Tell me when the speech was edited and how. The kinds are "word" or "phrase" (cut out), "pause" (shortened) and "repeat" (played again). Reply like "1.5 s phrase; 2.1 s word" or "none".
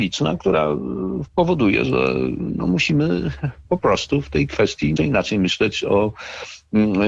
1.3 s pause; 5.0 s word